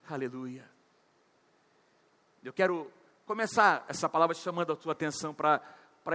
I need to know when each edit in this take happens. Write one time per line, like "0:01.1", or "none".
none